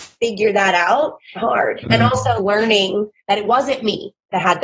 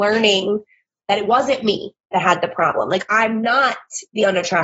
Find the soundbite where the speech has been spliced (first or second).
first